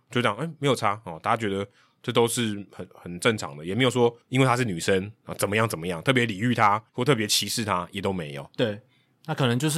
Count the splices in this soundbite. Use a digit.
2